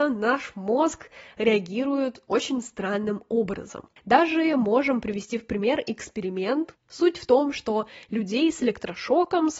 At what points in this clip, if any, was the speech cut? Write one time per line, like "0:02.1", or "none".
none